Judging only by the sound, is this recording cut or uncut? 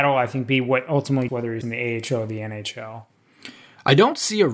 cut